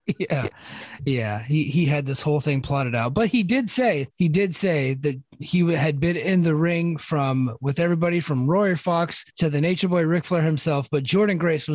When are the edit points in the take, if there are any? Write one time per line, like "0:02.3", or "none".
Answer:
0:04.1
0:09.3